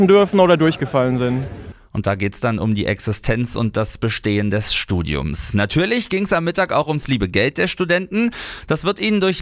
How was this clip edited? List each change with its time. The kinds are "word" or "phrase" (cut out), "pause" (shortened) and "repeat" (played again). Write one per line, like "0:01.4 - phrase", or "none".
none